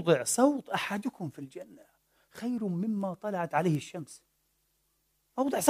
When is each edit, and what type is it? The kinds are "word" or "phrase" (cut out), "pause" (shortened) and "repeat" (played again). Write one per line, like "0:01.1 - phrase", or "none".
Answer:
none